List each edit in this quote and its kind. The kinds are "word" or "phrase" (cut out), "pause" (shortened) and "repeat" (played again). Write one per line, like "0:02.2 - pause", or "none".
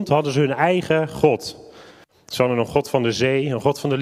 none